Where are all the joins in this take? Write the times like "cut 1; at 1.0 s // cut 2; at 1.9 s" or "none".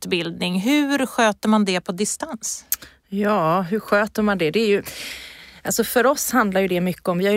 none